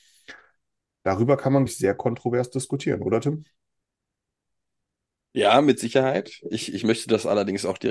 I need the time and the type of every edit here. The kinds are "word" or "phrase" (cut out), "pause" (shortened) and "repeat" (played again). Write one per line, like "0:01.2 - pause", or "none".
0:01.7 - word